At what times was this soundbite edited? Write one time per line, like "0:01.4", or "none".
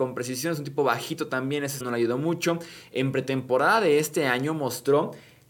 0:01.8